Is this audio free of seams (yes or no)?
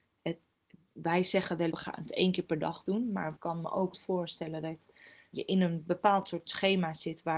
no